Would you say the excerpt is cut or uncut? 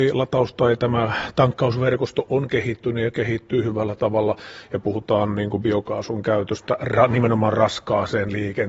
uncut